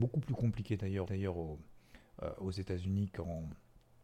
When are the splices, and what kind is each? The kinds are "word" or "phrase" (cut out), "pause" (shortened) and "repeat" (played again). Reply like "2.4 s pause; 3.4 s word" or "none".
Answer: 1.1 s repeat